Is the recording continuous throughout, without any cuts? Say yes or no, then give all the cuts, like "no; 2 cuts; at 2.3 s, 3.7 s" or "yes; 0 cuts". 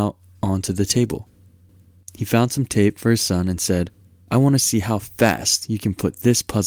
yes; 0 cuts